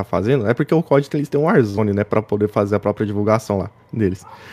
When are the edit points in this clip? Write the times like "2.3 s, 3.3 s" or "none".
none

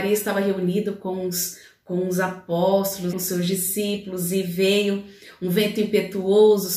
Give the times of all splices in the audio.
3.1 s

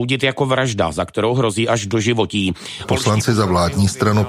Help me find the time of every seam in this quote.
none

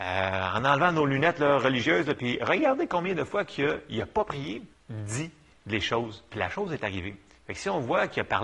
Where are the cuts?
4.7 s

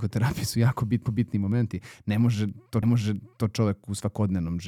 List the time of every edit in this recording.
1.1 s, 2.8 s

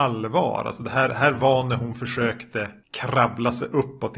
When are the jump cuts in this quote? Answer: none

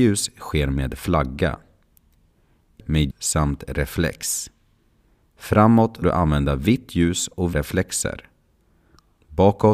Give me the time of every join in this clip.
2.8 s, 3.1 s, 6.0 s, 7.5 s

